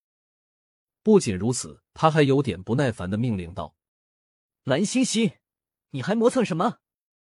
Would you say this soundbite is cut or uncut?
cut